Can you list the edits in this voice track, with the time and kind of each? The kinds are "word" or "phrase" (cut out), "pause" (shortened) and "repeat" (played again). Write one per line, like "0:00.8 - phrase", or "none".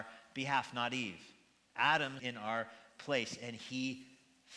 0:02.2 - word